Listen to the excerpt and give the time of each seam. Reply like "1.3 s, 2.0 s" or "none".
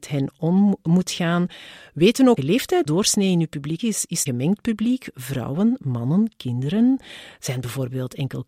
2.4 s, 2.9 s, 3.8 s, 4.3 s